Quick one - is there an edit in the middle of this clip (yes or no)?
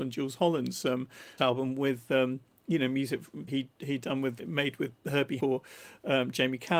yes